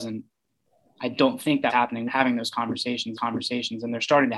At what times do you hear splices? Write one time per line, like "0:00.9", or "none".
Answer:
0:01.7
0:02.1
0:03.2